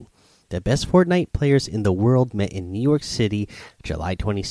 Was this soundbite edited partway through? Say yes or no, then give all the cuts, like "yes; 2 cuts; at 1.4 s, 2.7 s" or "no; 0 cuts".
no; 0 cuts